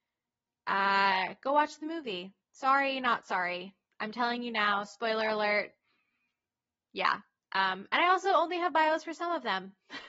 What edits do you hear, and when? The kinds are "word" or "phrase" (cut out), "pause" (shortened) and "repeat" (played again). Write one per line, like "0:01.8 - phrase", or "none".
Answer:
none